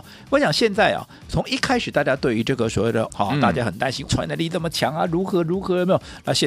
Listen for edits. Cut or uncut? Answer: cut